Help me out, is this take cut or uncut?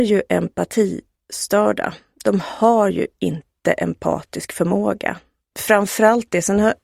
uncut